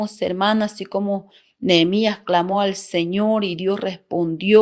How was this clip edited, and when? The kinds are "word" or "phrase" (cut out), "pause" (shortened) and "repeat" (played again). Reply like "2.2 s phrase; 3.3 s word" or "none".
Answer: none